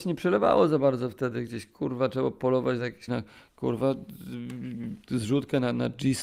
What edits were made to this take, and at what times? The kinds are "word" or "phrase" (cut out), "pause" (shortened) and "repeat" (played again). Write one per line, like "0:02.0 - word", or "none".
0:03.1 - phrase

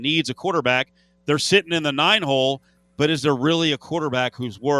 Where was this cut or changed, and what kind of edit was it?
none

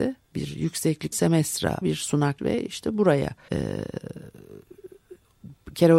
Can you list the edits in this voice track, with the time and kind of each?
0:01.1 - word
0:01.8 - word
0:02.4 - word
0:03.5 - word

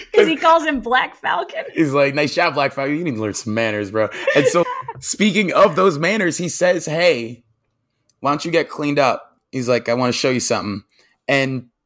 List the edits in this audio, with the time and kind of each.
0:04.6 - word

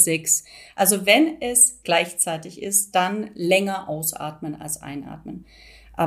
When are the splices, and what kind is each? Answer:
0:01.8 - word

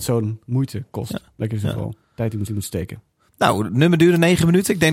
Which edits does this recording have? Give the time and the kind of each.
0:02.0 - pause
0:02.5 - repeat

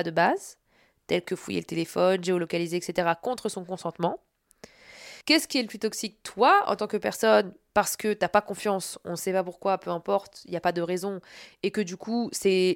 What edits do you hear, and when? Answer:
0:05.2 - pause

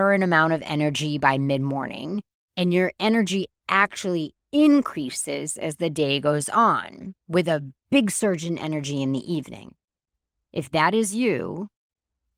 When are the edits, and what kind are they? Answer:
none

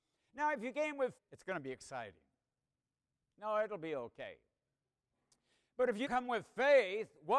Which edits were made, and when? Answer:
0:01.2 - word
0:06.1 - word

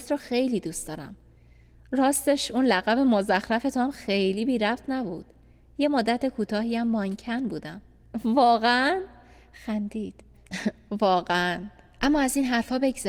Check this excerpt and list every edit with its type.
0:10.3 - pause

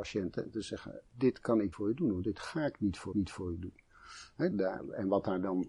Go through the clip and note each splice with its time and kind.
0:01.1 - pause
0:01.7 - word
0:03.1 - repeat
0:04.5 - word

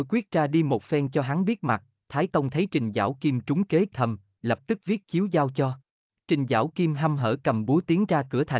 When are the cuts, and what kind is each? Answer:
0:03.9 - word
0:06.1 - pause

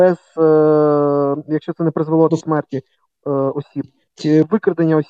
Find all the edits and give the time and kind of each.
0:02.3 - word
0:04.2 - word

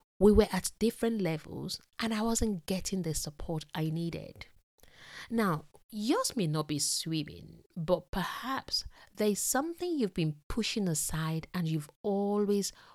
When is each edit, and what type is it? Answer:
none

